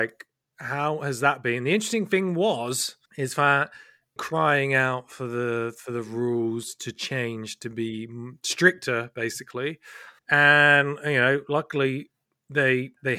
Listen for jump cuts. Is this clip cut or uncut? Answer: cut